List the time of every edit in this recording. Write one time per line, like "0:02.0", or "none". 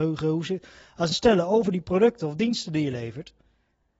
0:01.1